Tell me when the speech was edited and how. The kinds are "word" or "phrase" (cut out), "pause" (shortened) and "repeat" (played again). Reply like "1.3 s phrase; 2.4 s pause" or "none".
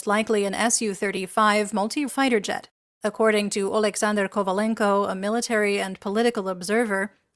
2.1 s word; 2.8 s pause